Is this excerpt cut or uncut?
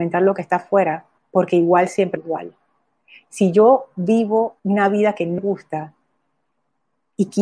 cut